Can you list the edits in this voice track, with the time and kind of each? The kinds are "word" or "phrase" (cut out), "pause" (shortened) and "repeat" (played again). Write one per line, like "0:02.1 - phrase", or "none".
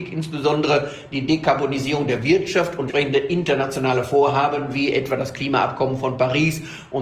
0:02.9 - word